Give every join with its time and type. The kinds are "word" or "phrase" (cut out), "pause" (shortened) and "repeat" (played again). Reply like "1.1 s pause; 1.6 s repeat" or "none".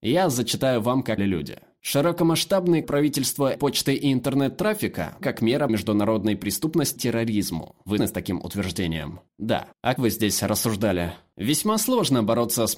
1.2 s word; 2.8 s word; 3.5 s word; 5.2 s word; 5.7 s word; 7.0 s word; 8.0 s word; 10.0 s word